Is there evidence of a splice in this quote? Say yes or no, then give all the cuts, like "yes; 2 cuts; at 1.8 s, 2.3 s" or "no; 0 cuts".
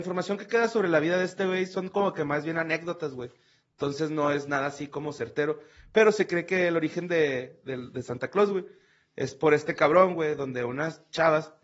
no; 0 cuts